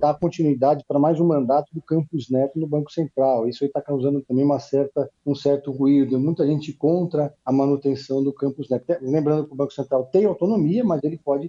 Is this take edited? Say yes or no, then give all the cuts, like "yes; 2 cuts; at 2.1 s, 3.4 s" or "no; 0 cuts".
yes; 2 cuts; at 5.2 s, 7.4 s